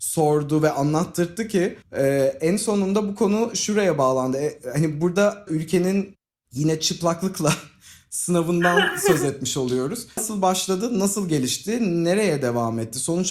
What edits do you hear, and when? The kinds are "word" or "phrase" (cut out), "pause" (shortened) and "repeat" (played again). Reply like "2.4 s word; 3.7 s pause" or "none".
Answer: 1.8 s pause; 5.5 s word

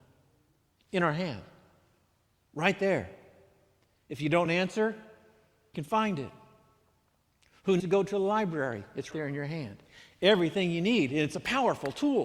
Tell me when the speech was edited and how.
4.5 s word; 5.7 s word; 7.8 s word; 9.1 s word

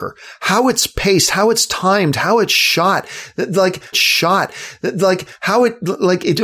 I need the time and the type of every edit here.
3.9 s repeat

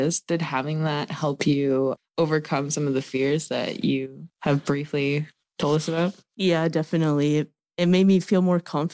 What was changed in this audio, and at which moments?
none

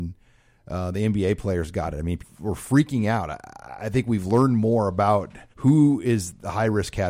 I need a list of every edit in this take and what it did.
2.2 s word; 5.5 s pause

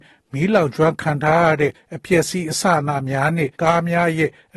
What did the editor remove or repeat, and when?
3.5 s pause

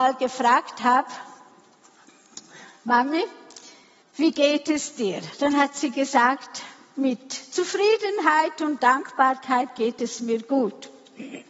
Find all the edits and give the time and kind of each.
4.0 s pause

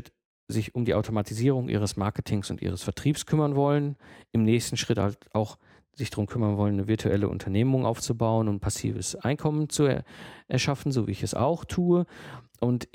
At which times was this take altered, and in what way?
none

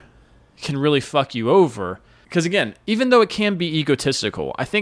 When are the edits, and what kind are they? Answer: none

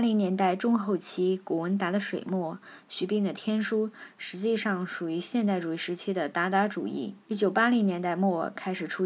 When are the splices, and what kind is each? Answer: 7.2 s pause

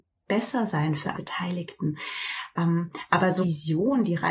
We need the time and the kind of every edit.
1.1 s word; 3.4 s word

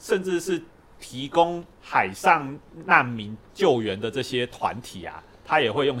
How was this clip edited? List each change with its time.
1.7 s pause

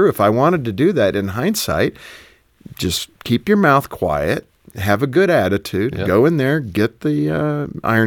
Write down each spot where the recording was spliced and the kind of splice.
none

